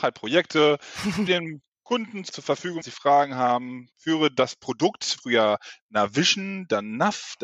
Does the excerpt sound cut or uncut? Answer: cut